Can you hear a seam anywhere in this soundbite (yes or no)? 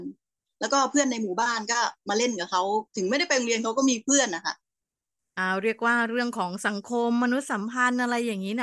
yes